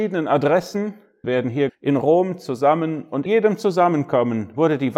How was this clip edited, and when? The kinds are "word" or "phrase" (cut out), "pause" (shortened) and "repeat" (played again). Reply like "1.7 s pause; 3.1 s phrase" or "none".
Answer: 1.2 s word; 1.7 s word; 3.3 s word